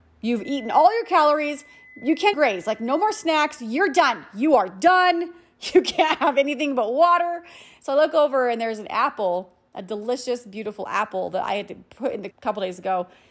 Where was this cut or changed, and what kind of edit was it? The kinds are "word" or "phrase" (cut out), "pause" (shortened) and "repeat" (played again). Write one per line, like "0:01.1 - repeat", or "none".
0:02.3 - word
0:12.3 - word